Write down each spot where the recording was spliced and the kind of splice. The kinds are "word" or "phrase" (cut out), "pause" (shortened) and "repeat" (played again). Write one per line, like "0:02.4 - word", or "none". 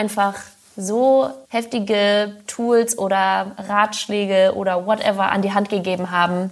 0:01.4 - pause